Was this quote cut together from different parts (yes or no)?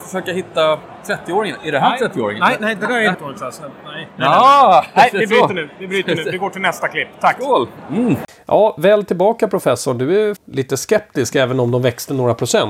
yes